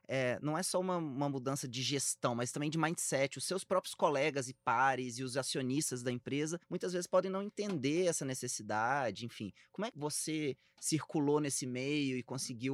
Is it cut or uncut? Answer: cut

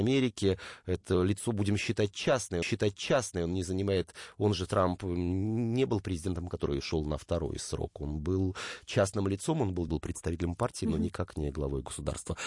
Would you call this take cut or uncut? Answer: cut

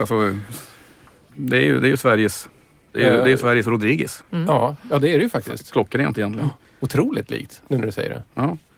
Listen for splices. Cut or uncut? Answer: uncut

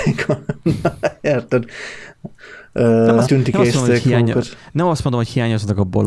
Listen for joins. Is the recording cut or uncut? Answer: cut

